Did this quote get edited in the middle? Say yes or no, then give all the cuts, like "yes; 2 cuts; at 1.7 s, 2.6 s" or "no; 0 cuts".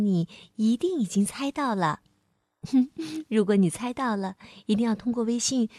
no; 0 cuts